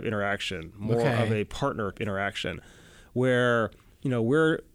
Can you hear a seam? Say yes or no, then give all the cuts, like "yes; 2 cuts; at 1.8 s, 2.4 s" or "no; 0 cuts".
yes; 1 cut; at 1.9 s